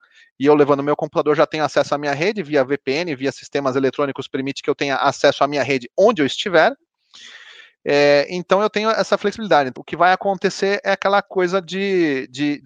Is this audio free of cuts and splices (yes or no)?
no